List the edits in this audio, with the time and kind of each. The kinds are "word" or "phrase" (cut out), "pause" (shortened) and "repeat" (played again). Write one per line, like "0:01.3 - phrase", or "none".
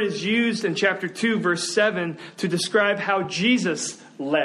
none